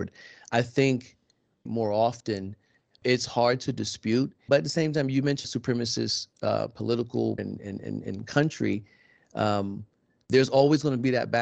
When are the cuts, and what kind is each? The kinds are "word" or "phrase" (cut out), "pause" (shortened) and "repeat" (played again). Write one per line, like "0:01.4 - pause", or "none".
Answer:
0:01.7 - phrase
0:03.0 - word
0:04.5 - word
0:05.4 - phrase
0:07.4 - word

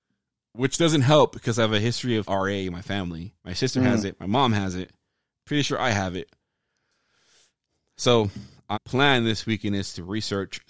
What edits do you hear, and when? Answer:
0:02.2 - word
0:03.4 - pause
0:08.7 - phrase

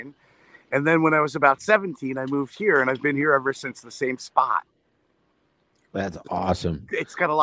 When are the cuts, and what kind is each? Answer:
none

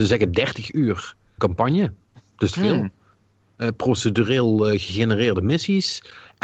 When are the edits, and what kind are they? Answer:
0:01.4 - word
0:02.5 - phrase

